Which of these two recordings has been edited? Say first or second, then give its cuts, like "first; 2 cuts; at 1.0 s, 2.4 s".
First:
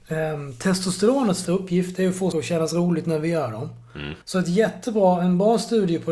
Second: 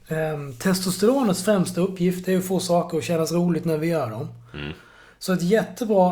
first; 3 cuts; at 1.4 s, 2.3 s, 4.2 s